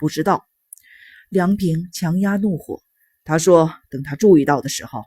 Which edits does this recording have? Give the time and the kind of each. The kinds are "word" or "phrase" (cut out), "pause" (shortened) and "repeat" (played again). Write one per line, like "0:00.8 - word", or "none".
0:02.9 - pause